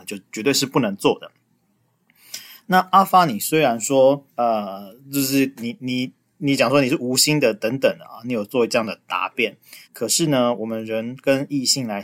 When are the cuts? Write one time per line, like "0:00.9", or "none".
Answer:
0:04.3
0:09.8